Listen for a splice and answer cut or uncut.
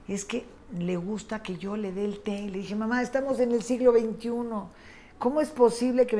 uncut